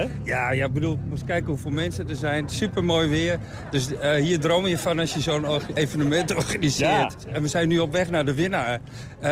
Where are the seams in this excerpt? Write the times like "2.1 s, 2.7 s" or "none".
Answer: 5.8 s